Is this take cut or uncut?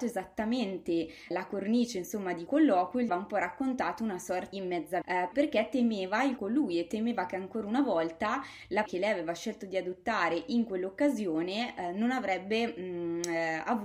cut